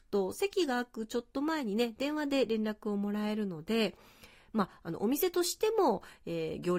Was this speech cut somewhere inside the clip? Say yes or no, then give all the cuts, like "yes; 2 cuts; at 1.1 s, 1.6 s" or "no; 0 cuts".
no; 0 cuts